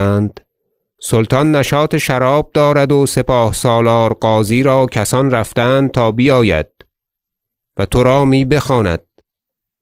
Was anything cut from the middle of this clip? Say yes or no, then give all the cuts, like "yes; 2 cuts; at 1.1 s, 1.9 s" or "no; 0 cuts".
no; 0 cuts